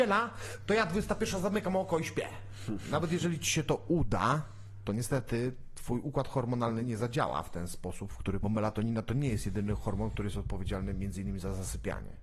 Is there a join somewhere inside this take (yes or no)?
yes